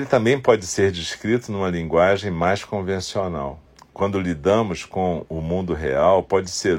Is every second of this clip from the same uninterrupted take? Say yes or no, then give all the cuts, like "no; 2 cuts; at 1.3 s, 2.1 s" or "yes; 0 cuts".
yes; 0 cuts